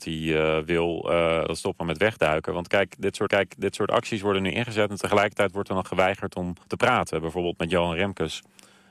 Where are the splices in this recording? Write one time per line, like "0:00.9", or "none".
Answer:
0:03.3
0:06.6